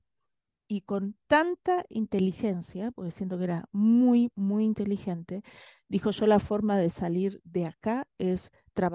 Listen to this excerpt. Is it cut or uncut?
uncut